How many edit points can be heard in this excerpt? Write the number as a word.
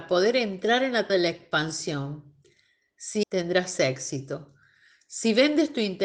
two